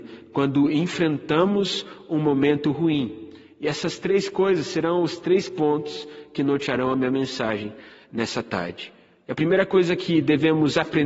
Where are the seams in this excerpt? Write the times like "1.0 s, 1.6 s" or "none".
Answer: none